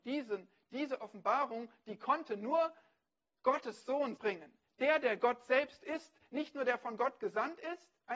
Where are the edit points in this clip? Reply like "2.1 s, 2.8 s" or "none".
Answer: 4.2 s